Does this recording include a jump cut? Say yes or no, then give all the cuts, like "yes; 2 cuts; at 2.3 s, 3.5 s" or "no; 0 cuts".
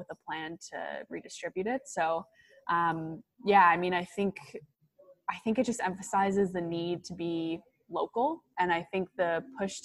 no; 0 cuts